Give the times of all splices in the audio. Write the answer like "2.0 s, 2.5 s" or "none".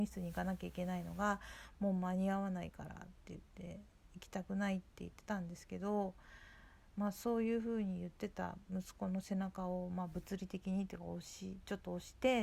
6.9 s